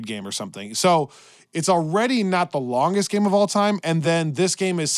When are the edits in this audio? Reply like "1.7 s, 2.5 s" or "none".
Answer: none